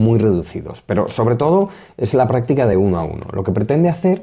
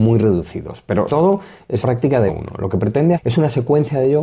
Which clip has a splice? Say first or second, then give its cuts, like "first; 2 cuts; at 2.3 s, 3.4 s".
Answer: second; 4 cuts; at 1.1 s, 1.8 s, 2.3 s, 3.1 s